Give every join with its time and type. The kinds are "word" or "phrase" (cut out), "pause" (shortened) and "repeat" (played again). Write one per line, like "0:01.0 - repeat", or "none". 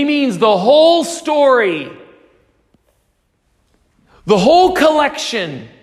none